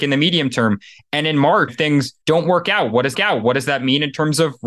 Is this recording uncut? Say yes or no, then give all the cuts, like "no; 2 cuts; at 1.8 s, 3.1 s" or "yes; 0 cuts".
no; 3 cuts; at 1.7 s, 2.2 s, 3.1 s